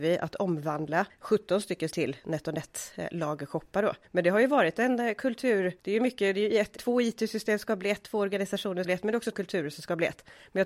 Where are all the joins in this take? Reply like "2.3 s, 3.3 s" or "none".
1.1 s, 1.9 s, 4.0 s, 5.8 s, 6.8 s, 8.8 s, 9.3 s